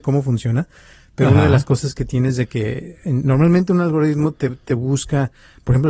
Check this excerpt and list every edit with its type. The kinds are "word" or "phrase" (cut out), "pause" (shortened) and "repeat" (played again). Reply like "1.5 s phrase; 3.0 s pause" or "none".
none